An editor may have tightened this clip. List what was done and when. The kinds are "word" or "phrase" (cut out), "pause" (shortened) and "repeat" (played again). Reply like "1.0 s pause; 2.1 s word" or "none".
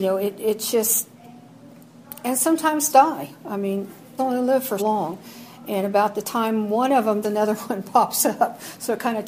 2.9 s word; 4.2 s word; 4.8 s word; 7.2 s word